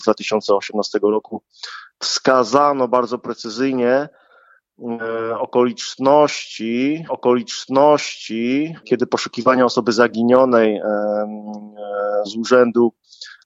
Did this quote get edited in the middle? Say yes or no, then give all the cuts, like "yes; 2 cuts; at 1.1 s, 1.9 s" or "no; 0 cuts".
yes; 2 cuts; at 7.1 s, 12.2 s